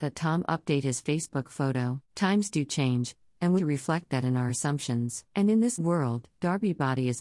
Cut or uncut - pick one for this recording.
cut